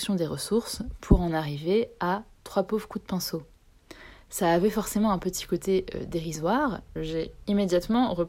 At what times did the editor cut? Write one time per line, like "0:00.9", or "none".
0:07.0